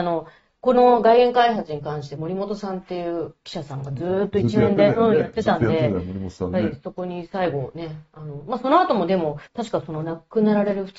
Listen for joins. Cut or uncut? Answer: cut